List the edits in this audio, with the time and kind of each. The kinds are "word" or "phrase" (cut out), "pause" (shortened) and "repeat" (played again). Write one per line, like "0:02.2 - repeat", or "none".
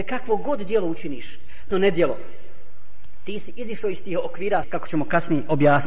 0:01.7 - word
0:04.6 - word